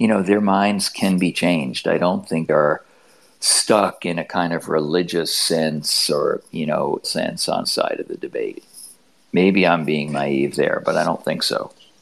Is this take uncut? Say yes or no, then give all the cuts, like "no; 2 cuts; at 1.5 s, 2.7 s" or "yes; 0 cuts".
no; 4 cuts; at 2.5 s, 7.0 s, 7.6 s, 10.1 s